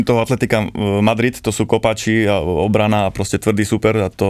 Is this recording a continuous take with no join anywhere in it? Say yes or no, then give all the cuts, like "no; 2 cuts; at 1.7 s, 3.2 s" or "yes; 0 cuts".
yes; 0 cuts